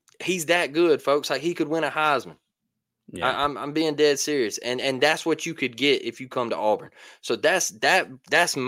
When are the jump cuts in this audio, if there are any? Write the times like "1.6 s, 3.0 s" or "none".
none